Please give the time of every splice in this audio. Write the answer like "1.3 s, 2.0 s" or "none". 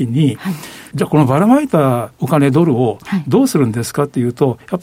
0.9 s, 2.1 s